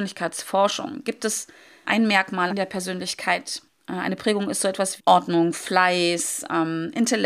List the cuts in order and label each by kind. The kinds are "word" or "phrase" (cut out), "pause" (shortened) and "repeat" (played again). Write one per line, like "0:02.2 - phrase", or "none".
0:01.8 - word
0:02.5 - phrase
0:03.7 - pause
0:05.0 - word